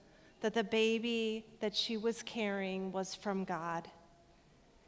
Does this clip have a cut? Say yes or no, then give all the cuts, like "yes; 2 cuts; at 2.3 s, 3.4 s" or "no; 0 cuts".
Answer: no; 0 cuts